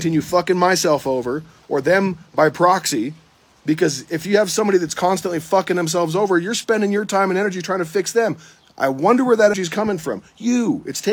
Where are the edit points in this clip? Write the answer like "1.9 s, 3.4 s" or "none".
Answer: 9.5 s